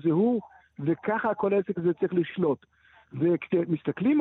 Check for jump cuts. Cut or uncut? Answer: uncut